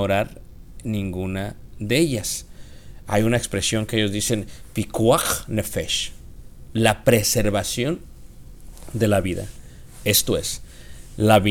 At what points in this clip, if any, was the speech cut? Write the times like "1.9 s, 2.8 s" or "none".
none